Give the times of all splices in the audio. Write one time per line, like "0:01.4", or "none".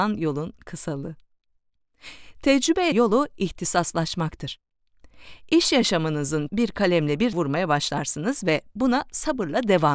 0:02.9
0:06.5
0:07.3